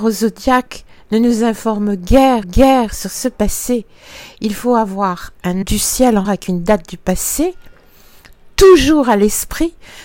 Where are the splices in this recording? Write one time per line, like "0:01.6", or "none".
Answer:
0:02.4
0:05.6
0:06.2